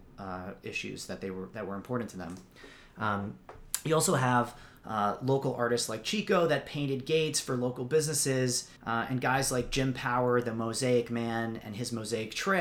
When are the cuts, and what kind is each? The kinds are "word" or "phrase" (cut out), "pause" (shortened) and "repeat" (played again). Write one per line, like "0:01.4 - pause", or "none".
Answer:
0:08.8 - pause